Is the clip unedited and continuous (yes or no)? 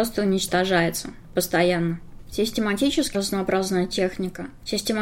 no